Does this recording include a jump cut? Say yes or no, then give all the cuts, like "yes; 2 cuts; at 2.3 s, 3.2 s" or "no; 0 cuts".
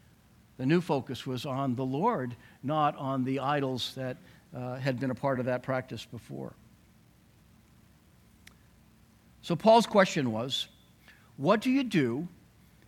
no; 0 cuts